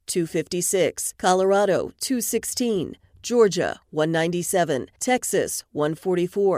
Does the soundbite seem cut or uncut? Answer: uncut